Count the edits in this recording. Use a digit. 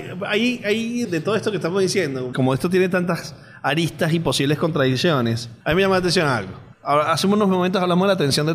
4